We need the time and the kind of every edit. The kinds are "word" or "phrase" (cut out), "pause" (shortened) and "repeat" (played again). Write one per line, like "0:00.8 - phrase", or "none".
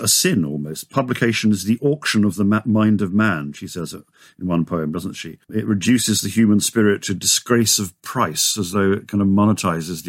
0:05.4 - pause